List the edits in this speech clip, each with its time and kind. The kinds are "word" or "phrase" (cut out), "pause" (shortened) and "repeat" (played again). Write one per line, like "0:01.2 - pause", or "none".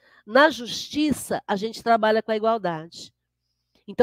none